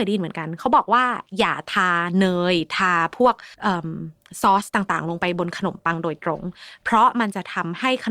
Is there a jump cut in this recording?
yes; 1 cut; at 3.5 s

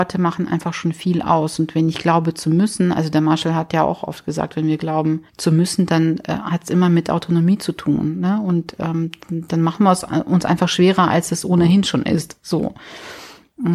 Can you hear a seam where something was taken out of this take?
yes; 1 cut; at 5.3 s

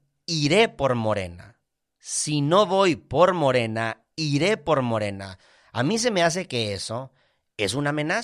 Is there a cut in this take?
no; 0 cuts

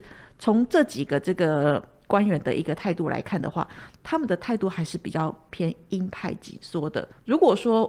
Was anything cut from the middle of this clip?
no; 0 cuts

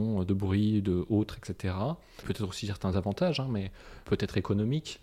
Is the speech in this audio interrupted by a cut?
no; 0 cuts

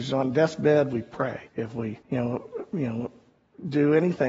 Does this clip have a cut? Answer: yes; 2 cuts; at 1.5 s, 2.0 s

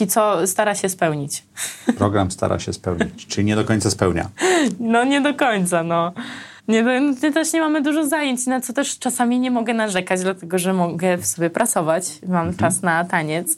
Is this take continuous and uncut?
no; 1 cut; at 6.6 s

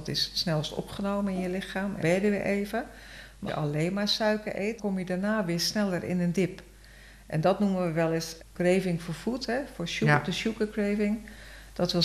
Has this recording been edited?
yes; 4 cuts; at 2.0 s, 3.5 s, 4.8 s, 8.4 s

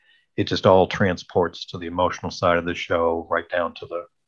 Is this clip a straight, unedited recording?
yes; 0 cuts

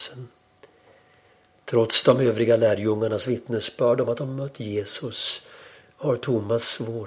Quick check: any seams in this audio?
no; 0 cuts

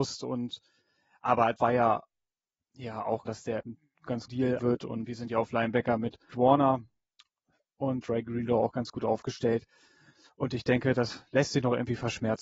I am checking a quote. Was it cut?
yes; 8 cuts; at 1.6 s, 3.3 s, 3.6 s, 4.3 s, 4.6 s, 5.1 s, 6.3 s, 8.0 s

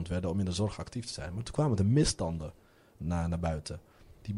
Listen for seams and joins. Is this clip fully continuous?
yes; 0 cuts

